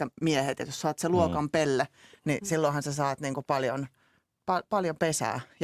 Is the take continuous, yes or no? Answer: yes